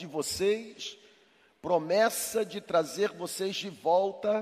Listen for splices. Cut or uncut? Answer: uncut